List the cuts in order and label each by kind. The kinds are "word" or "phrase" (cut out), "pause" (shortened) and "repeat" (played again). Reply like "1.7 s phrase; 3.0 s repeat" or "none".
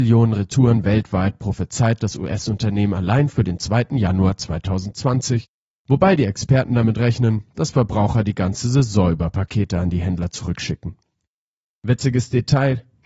none

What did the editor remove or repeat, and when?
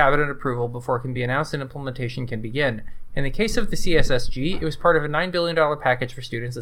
none

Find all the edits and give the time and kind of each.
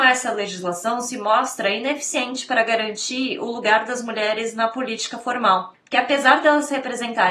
none

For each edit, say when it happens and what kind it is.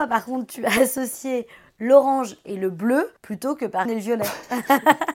3.2 s pause; 3.8 s phrase

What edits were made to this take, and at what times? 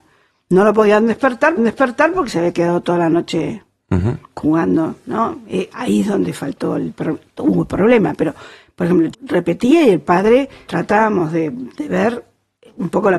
1.6 s repeat; 4.3 s pause; 9.1 s word; 10.7 s word

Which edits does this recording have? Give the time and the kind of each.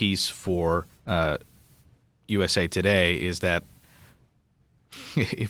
0.9 s pause

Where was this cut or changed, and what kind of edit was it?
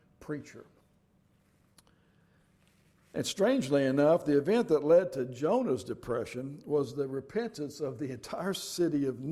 none

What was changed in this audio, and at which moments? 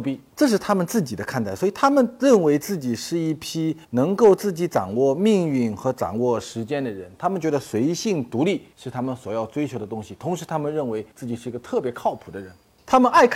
3.8 s pause; 8.7 s pause; 11.1 s pause

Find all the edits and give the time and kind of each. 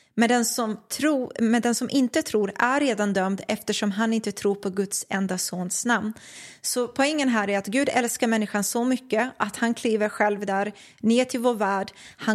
none

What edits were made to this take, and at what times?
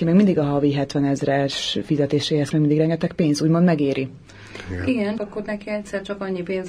2.5 s word; 5.2 s word

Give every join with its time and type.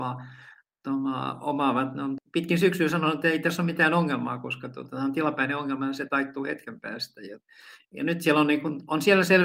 none

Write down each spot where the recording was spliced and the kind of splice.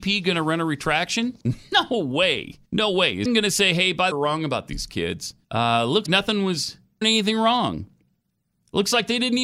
1.4 s pause; 2.7 s pause; 3.3 s word; 4.1 s phrase; 5.4 s pause; 6.1 s word; 7.0 s phrase

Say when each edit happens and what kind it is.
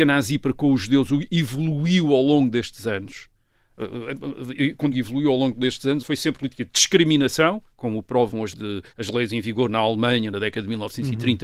4.9 s phrase; 6.0 s word; 6.4 s word; 7.7 s pause; 8.5 s word; 8.9 s pause

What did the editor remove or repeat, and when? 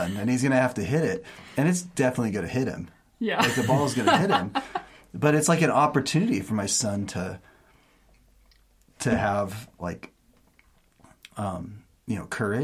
none

